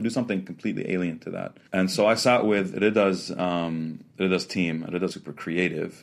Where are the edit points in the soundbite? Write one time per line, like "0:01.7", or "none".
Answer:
0:01.7
0:04.1
0:05.1